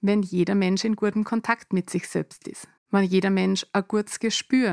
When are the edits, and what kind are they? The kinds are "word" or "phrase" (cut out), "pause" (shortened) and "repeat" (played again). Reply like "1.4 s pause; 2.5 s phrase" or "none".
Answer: 2.8 s pause